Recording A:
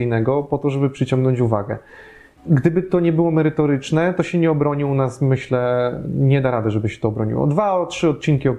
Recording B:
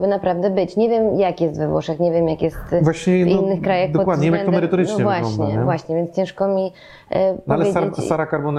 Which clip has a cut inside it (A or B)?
A